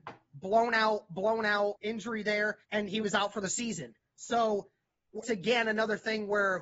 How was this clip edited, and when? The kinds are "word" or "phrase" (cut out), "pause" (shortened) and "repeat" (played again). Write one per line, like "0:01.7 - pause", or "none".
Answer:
0:01.8 - word
0:02.6 - pause
0:05.2 - word